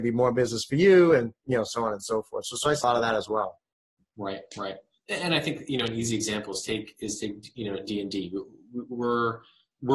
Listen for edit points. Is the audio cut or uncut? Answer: cut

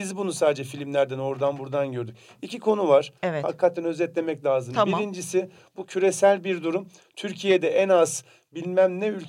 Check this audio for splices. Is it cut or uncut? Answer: cut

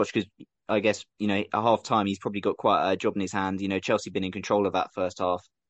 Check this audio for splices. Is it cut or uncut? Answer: uncut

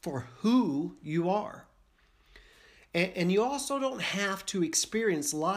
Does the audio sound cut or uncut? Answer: uncut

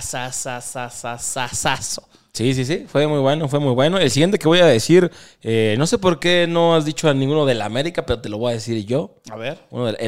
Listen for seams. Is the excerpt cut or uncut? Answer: uncut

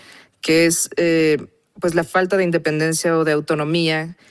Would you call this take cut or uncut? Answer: uncut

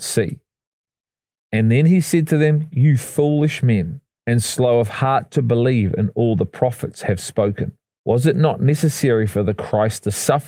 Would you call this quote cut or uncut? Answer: cut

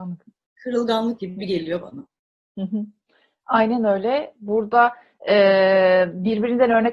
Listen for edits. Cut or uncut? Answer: cut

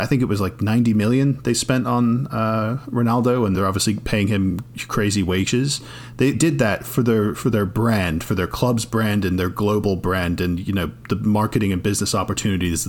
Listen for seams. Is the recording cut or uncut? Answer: cut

